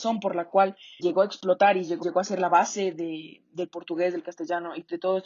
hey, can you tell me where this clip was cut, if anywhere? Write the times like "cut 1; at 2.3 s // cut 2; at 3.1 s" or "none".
cut 1; at 1.0 s // cut 2; at 2.0 s

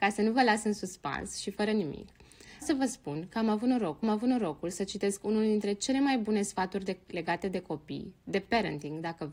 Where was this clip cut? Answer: cut 1; at 2.6 s // cut 2; at 4.0 s

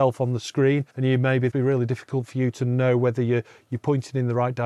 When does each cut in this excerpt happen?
cut 1; at 0.9 s // cut 2; at 1.5 s

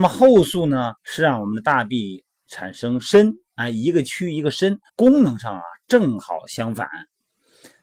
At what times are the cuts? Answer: cut 1; at 1.0 s // cut 2; at 4.9 s

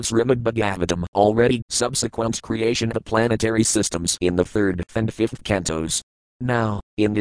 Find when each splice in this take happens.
cut 1; at 1.1 s // cut 2; at 1.6 s // cut 3; at 2.9 s // cut 4; at 4.9 s

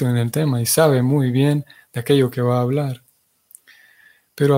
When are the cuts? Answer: none

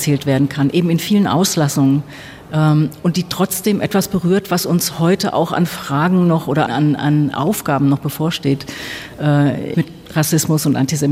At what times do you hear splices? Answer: cut 1; at 6.7 s // cut 2; at 7.3 s // cut 3; at 9.7 s

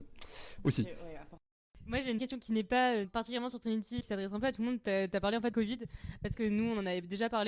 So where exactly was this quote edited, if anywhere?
cut 1; at 2.2 s // cut 2; at 3.0 s // cut 3; at 4.0 s // cut 4; at 5.5 s // cut 5; at 6.3 s

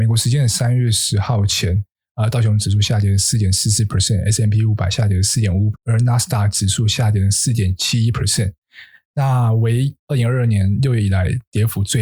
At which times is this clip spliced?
cut 1; at 5.7 s

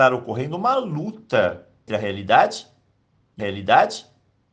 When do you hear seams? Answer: cut 1; at 1.9 s // cut 2; at 3.4 s

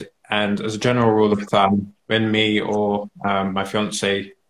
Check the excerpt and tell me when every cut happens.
cut 1; at 2.0 s

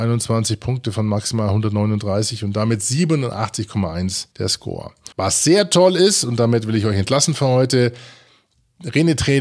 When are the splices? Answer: cut 1; at 4.3 s // cut 2; at 5.1 s

